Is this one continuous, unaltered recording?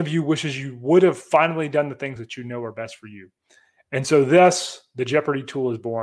yes; 0 cuts

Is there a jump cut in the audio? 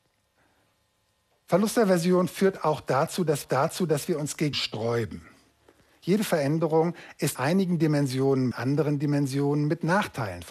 yes; 4 cuts; at 3.4 s, 4.5 s, 7.3 s, 8.5 s

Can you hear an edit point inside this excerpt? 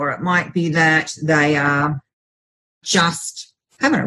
no; 0 cuts

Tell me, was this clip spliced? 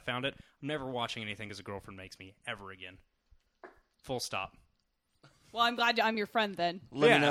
no; 0 cuts

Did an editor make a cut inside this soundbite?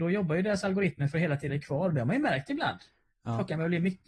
yes; 1 cut; at 1.5 s

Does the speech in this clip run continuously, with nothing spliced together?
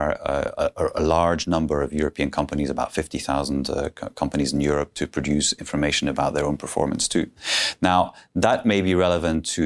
yes; 0 cuts

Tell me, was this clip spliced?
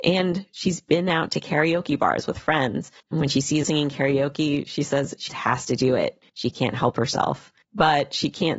yes; 5 cuts; at 3.0 s, 3.6 s, 5.3 s, 6.3 s, 7.6 s

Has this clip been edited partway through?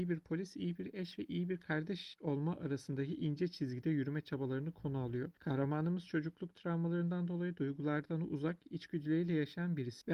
yes; 1 cut; at 5.3 s

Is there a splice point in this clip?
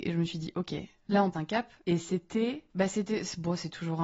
yes; 2 cuts; at 1.3 s, 1.8 s

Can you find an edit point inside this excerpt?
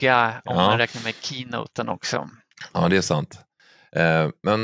no; 0 cuts

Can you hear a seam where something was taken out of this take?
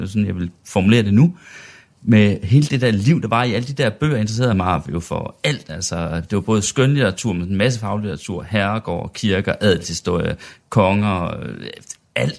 no; 0 cuts

